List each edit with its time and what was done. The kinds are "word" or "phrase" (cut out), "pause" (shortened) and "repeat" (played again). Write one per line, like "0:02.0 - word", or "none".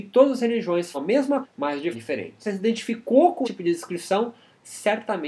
0:00.9 - word
0:01.4 - word
0:01.9 - word
0:02.4 - word
0:03.4 - word